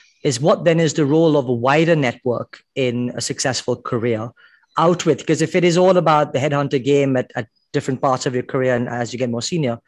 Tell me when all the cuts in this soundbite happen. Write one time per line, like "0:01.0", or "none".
none